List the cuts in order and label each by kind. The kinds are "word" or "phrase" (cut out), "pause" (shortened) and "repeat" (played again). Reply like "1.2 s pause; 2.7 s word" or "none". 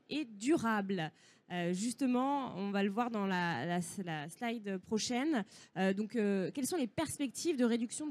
none